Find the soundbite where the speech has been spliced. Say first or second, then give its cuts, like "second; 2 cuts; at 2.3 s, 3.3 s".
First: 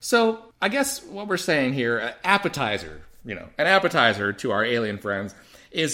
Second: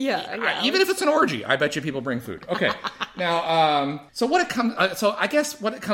second; 1 cut; at 4.1 s